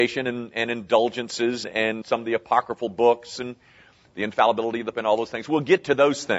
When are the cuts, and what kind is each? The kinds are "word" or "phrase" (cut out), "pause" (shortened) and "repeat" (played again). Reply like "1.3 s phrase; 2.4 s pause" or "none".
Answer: 1.6 s word; 2.0 s word; 4.9 s word